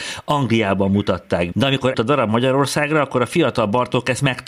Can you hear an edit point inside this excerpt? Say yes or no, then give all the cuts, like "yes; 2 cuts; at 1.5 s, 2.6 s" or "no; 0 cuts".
yes; 2 cuts; at 1.5 s, 1.9 s